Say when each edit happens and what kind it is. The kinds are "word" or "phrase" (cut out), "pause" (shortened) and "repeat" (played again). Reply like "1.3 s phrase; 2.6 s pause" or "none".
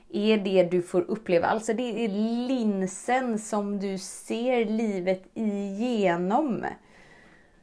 none